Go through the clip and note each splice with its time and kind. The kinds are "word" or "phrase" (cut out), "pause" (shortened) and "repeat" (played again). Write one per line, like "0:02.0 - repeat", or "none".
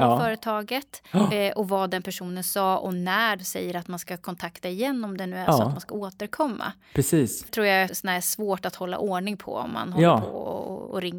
0:03.4 - word
0:07.5 - word
0:07.9 - word